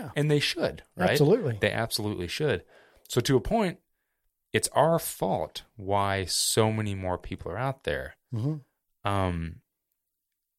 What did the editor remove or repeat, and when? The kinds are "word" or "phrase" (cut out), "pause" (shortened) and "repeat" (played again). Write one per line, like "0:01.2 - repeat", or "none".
none